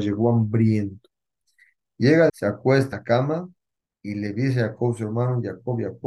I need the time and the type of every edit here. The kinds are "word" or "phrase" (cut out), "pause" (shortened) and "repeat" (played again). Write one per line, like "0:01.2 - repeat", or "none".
0:02.3 - phrase
0:02.9 - word